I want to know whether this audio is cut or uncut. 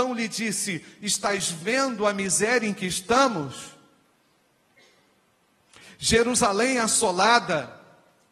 uncut